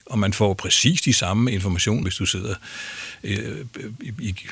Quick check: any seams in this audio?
yes; 1 cut; at 2.0 s

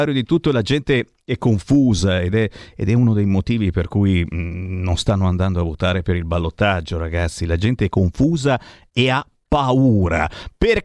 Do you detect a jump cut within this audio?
no; 0 cuts

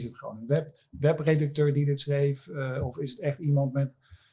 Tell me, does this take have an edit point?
no; 0 cuts

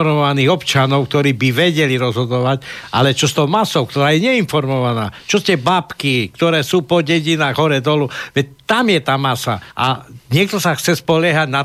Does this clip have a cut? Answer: yes; 1 cut; at 9.7 s

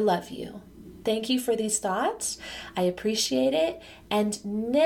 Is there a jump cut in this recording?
no; 0 cuts

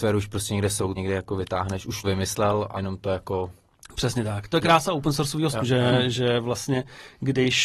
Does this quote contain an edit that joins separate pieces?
yes; 4 cuts; at 1.0 s, 2.0 s, 2.8 s, 5.5 s

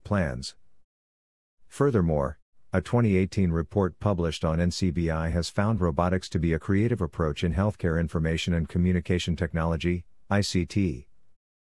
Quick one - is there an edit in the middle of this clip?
no; 0 cuts

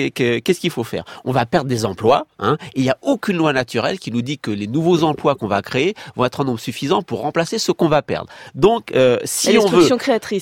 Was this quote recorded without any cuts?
yes; 0 cuts

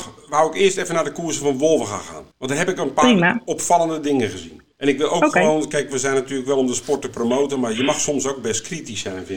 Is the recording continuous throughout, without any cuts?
no; 2 cuts; at 2.3 s, 4.7 s

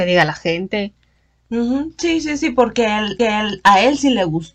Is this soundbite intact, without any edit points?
no; 1 cut; at 3.2 s

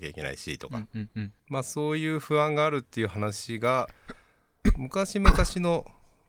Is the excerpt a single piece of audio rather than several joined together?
no; 1 cut; at 1.4 s

